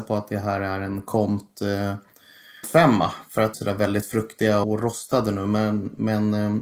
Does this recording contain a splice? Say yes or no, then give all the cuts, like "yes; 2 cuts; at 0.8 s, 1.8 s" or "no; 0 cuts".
yes; 3 cuts; at 2.6 s, 3.5 s, 4.6 s